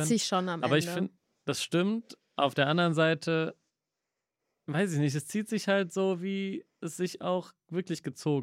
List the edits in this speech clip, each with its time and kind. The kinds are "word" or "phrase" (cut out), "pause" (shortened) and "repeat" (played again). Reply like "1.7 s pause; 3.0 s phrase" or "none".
none

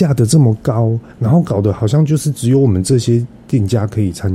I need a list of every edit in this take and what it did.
1.1 s pause

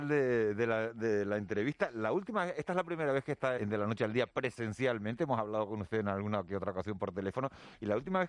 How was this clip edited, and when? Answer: 3.6 s word

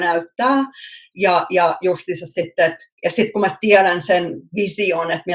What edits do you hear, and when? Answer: 2.9 s pause

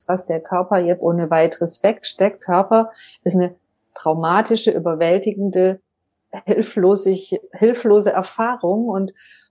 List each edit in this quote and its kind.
1.0 s word; 2.4 s phrase; 3.3 s word

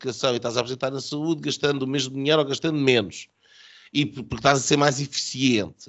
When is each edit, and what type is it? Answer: none

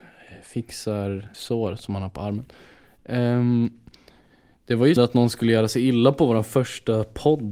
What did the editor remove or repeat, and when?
1.3 s word; 5.0 s word

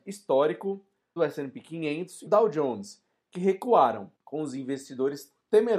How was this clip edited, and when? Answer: 1.2 s phrase; 2.3 s word; 4.2 s pause

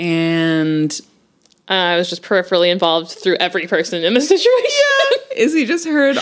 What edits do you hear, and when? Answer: none

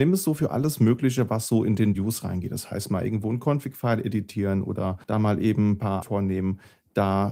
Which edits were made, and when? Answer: 1.9 s word; 5.0 s pause; 6.0 s phrase

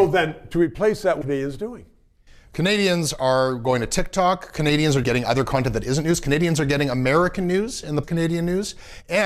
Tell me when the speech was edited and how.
1.2 s word; 5.0 s word; 8.0 s word

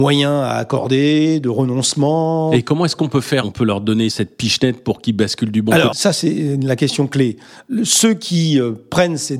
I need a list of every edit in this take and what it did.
5.9 s word

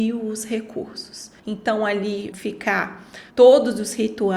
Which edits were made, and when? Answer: 1.4 s pause; 2.3 s word; 3.3 s pause

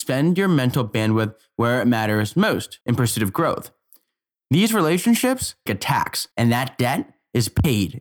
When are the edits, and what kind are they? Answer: 2.8 s pause; 5.7 s word; 6.3 s pause

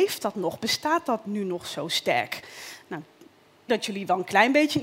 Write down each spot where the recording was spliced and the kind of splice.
3.7 s word

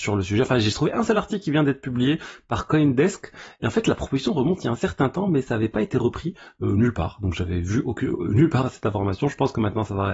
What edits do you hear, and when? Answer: none

